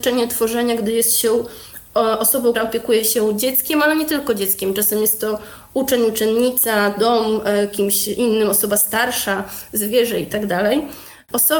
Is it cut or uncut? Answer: cut